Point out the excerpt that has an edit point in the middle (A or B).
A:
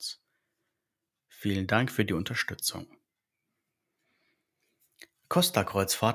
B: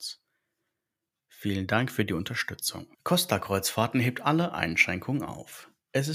B